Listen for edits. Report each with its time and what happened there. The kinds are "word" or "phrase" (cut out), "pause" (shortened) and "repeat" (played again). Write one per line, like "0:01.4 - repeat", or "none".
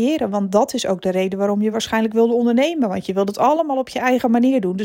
none